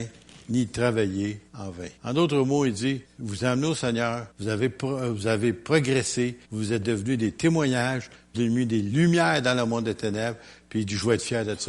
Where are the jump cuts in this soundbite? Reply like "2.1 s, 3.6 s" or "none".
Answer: 1.5 s, 2.0 s, 3.1 s, 4.3 s, 6.4 s, 8.3 s